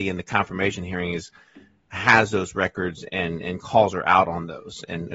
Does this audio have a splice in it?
no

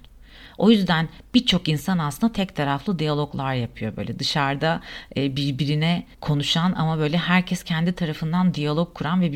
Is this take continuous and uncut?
no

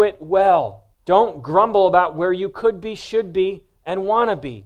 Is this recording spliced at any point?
yes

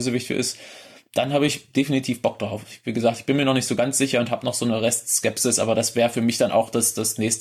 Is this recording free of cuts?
yes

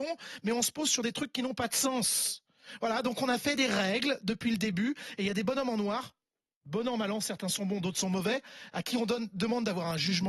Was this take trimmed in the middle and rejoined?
no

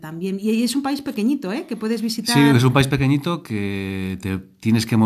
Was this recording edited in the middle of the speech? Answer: no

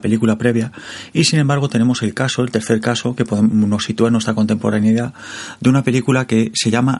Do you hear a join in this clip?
no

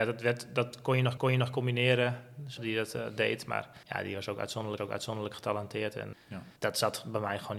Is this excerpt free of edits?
no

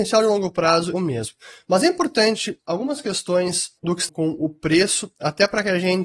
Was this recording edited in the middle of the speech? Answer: yes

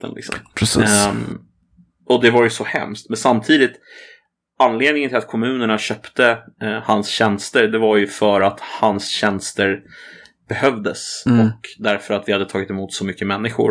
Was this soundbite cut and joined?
no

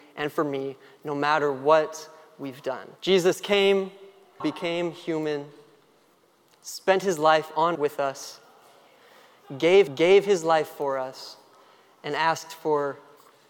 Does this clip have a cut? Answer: yes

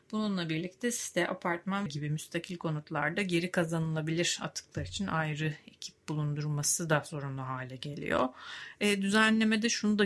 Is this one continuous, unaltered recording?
no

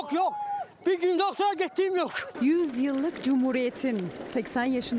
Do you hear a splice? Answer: no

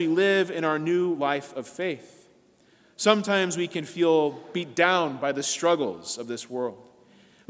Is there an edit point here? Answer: no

